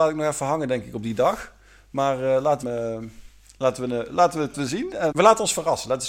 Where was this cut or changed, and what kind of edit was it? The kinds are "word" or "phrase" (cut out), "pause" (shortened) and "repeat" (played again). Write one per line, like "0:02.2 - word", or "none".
0:02.6 - word
0:04.5 - word
0:05.1 - word